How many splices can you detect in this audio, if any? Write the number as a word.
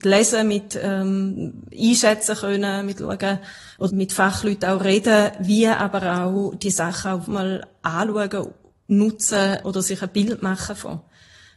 three